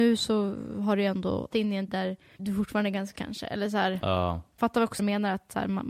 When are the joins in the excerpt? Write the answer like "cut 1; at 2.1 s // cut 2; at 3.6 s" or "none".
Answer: cut 1; at 1.5 s // cut 2; at 1.9 s // cut 3; at 2.4 s // cut 4; at 3.2 s // cut 5; at 4.6 s // cut 6; at 5.0 s